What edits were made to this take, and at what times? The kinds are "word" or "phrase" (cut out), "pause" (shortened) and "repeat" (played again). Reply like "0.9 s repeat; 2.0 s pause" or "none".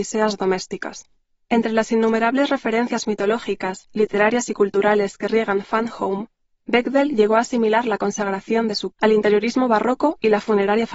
8.9 s word